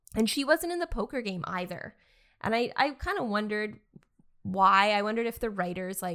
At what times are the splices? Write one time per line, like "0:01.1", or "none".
none